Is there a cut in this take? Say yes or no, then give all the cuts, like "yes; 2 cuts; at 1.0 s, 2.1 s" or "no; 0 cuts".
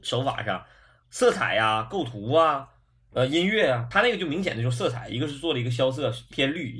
no; 0 cuts